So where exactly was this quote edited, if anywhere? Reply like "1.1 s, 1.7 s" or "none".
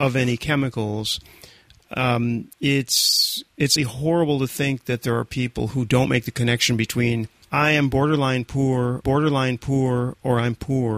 2.5 s, 3.8 s, 7.4 s, 9.0 s